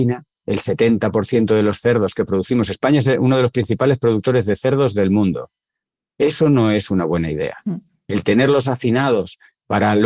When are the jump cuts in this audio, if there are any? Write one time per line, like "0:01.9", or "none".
none